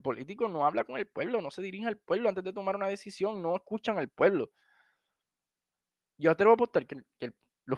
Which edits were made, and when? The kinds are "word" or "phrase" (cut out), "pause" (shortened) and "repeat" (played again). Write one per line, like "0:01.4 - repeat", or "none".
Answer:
none